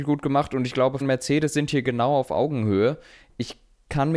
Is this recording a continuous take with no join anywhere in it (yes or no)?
no